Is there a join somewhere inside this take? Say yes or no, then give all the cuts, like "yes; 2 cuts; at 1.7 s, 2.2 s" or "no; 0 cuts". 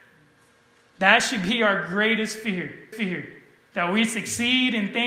yes; 1 cut; at 2.9 s